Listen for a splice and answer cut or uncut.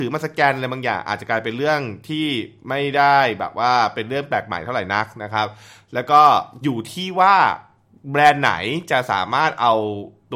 uncut